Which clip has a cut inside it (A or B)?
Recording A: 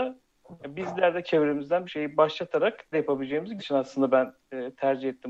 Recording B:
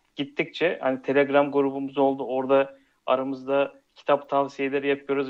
A